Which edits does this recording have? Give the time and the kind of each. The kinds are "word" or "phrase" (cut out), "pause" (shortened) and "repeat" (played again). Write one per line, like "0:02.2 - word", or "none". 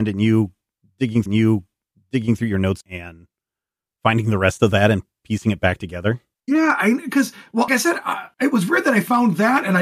0:01.3 - repeat
0:02.8 - word
0:06.3 - pause
0:07.7 - word
0:08.3 - pause